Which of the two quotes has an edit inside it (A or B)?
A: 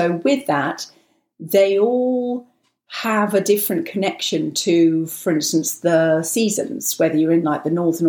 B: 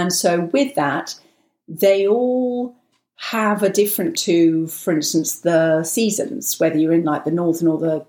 B